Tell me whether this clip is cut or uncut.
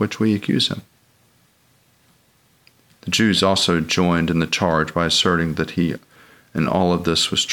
uncut